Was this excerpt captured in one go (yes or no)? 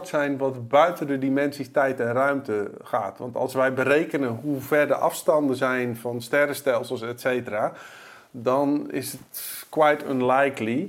yes